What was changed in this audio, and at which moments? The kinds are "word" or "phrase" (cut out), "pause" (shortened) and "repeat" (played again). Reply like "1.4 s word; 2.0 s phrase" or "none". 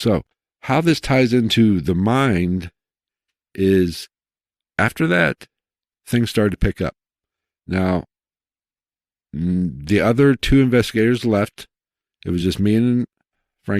none